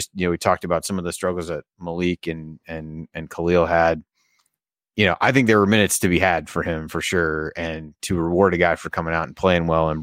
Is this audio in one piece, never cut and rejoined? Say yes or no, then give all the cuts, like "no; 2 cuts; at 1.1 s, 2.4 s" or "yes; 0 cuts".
yes; 0 cuts